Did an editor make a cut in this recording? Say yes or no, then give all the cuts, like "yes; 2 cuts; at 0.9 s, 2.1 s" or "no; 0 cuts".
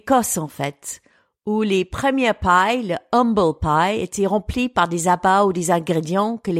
no; 0 cuts